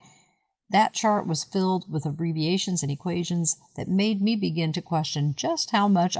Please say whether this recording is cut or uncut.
uncut